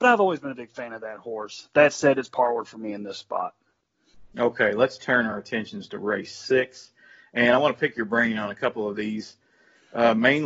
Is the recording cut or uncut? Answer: uncut